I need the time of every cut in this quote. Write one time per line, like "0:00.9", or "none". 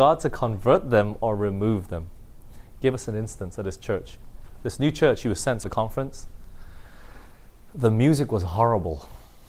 0:05.6